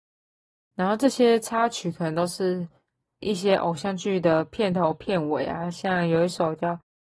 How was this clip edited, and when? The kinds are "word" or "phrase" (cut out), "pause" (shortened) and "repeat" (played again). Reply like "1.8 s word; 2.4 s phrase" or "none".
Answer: 3.2 s word